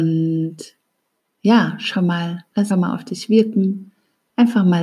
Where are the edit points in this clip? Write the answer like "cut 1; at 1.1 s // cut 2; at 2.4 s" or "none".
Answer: cut 1; at 1.9 s // cut 2; at 2.7 s